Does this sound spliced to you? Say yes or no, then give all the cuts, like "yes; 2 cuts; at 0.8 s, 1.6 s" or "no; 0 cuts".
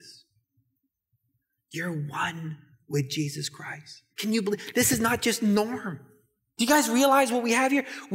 yes; 1 cut; at 4.1 s